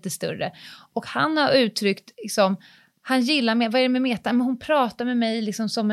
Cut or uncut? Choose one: cut